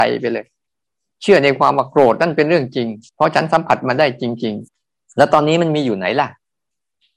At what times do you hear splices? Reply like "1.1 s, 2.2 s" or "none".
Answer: 3.1 s, 4.7 s